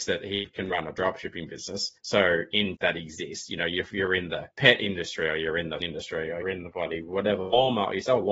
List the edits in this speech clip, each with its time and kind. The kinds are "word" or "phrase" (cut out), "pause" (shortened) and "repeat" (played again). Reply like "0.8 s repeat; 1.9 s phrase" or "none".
2.0 s pause; 2.8 s phrase; 4.5 s pause; 5.8 s word; 6.4 s word